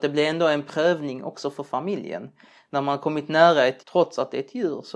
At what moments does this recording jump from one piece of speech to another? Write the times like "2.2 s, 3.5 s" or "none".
3.8 s